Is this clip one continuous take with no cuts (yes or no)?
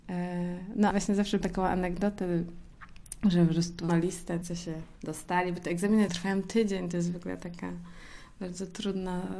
no